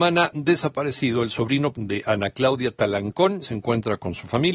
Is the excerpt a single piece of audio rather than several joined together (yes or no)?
no